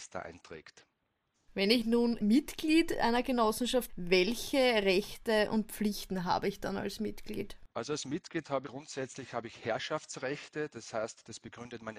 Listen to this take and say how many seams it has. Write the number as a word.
four